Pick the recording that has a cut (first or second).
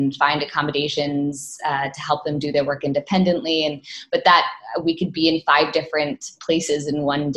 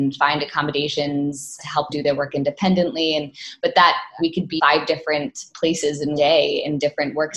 second